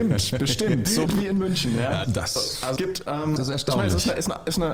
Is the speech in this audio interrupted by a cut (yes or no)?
yes